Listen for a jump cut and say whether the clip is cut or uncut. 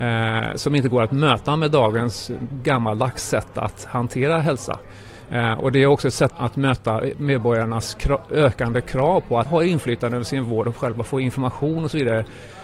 cut